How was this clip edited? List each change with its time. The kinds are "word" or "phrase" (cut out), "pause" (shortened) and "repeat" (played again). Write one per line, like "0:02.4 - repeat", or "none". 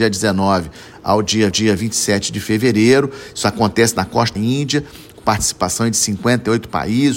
0:01.5 - repeat
0:04.4 - phrase